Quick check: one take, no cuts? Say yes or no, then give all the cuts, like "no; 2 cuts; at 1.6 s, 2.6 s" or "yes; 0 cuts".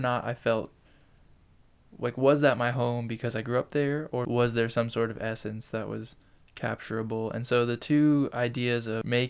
yes; 0 cuts